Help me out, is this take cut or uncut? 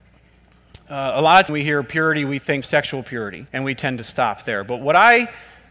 cut